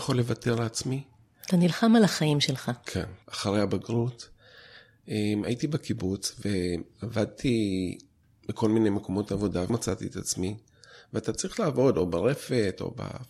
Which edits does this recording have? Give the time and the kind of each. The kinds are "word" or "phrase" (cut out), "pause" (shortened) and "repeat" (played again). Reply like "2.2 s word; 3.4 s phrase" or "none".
3.2 s pause; 9.7 s word